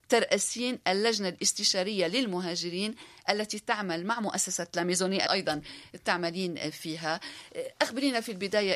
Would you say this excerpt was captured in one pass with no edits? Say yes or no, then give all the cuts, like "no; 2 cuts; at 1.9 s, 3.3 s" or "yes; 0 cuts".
no; 1 cut; at 5.3 s